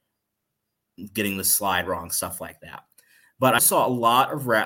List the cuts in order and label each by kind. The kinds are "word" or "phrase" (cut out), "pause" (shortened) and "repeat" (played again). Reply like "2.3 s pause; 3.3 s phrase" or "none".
3.6 s word